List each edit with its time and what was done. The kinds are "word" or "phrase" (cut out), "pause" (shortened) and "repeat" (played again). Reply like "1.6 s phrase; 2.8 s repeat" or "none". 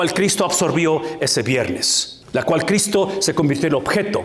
2.2 s pause